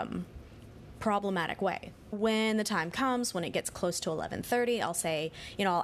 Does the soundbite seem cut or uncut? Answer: cut